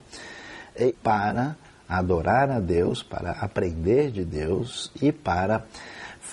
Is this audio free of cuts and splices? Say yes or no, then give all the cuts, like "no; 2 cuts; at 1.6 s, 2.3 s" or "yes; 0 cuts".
no; 1 cut; at 0.9 s